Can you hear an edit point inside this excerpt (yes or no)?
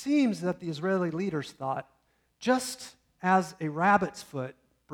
no